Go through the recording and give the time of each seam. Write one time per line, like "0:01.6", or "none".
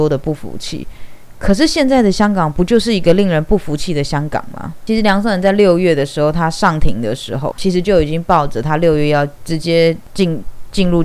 0:07.5